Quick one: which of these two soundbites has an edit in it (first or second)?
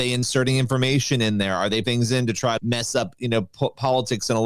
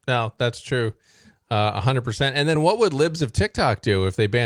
first